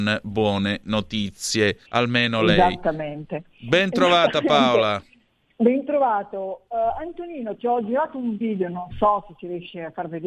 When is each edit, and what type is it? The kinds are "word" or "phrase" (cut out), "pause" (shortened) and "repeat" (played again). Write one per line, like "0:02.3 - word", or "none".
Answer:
0:01.9 - pause

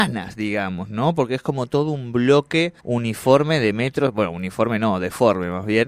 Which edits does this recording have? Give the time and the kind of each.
0:02.8 - pause

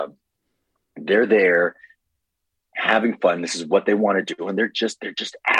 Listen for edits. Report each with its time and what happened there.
none

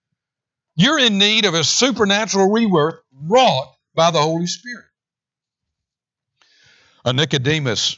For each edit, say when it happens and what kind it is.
none

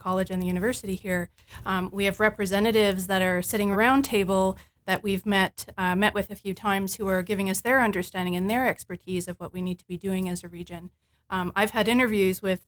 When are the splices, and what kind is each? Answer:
0:03.7 - word

